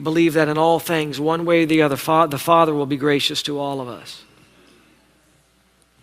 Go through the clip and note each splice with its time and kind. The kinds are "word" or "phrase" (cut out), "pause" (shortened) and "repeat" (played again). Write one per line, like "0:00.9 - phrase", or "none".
none